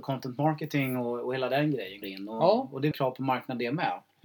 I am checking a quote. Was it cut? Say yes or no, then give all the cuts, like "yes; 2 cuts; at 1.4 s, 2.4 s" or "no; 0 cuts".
yes; 2 cuts; at 2.0 s, 2.9 s